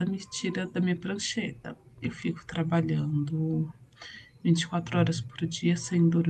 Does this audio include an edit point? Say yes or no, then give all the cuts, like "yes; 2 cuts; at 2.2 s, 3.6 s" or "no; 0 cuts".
no; 0 cuts